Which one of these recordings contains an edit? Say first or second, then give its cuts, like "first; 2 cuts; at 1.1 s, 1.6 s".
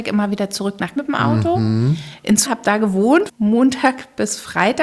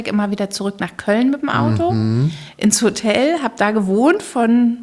first; 3 cuts; at 1.0 s, 2.5 s, 3.3 s